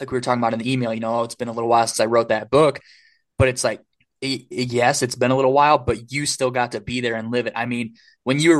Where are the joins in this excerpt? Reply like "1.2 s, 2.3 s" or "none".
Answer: none